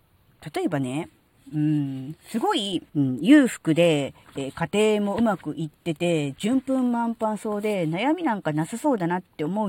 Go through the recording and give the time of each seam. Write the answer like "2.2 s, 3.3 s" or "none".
2.9 s